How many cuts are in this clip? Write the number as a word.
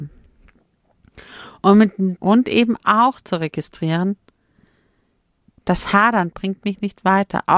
one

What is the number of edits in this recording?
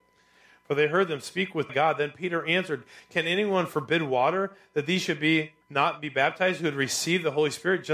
two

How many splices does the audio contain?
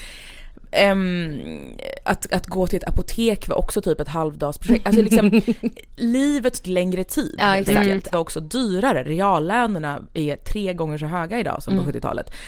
two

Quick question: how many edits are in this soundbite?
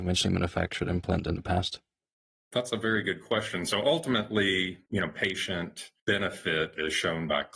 three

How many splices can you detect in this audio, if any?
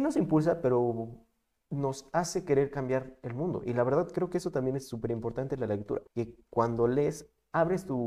one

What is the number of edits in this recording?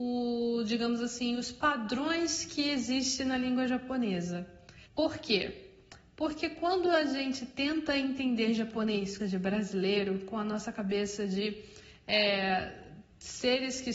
two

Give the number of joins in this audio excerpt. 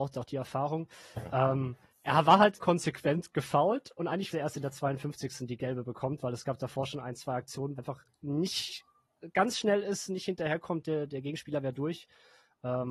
four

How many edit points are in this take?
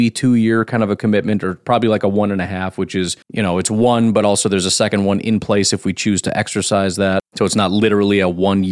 one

